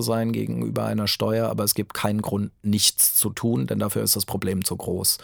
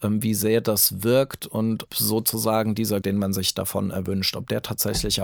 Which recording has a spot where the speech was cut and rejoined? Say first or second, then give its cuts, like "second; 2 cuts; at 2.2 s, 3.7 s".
second; 2 cuts; at 1.9 s, 3.0 s